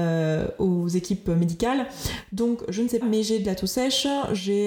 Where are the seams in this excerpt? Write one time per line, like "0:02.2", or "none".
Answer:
0:03.0